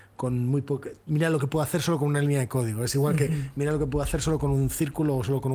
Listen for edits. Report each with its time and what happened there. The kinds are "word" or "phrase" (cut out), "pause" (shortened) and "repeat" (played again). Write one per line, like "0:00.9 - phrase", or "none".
none